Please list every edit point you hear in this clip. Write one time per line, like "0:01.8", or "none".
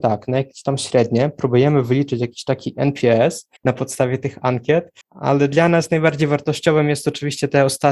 0:03.6
0:05.0